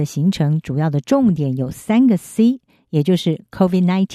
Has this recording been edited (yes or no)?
no